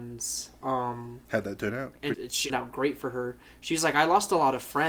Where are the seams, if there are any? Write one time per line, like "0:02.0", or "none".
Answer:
0:01.2
0:02.1
0:02.5